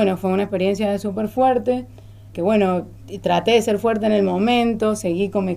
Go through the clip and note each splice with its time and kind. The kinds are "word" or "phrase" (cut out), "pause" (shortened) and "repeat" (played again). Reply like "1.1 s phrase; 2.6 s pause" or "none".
2.3 s word